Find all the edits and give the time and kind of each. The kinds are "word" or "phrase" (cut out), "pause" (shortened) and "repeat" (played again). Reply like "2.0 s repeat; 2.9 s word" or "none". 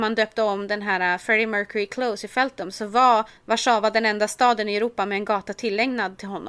3.4 s pause